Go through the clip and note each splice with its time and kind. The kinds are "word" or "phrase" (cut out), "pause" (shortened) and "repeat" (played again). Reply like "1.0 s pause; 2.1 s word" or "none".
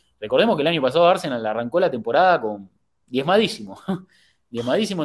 none